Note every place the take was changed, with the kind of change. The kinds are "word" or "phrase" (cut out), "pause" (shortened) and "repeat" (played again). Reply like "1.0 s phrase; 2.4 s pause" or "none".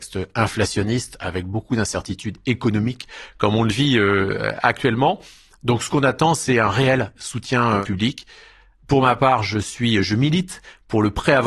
none